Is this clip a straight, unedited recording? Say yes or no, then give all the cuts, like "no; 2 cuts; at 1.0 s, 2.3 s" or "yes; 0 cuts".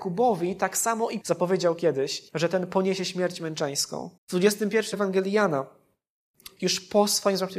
no; 5 cuts; at 1.2 s, 2.3 s, 4.2 s, 4.9 s, 6.6 s